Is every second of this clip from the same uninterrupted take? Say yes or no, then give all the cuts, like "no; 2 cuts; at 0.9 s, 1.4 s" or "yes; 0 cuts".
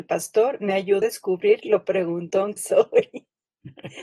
no; 2 cuts; at 1.0 s, 2.6 s